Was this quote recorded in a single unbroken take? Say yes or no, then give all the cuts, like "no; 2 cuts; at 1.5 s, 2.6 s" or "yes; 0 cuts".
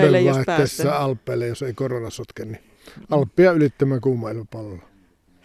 yes; 0 cuts